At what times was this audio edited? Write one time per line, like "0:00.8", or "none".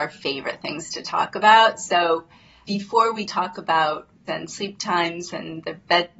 0:02.6
0:03.3
0:04.3